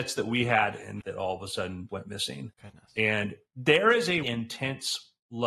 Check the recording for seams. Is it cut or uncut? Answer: cut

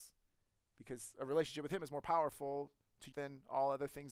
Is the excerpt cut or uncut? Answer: cut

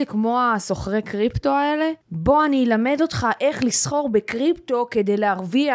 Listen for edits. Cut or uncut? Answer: cut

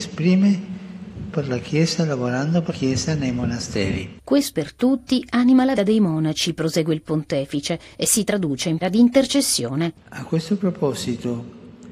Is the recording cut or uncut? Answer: cut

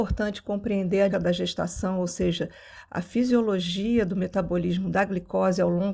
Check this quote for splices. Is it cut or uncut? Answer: cut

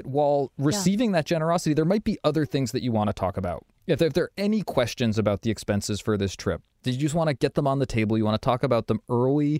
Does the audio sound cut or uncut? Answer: uncut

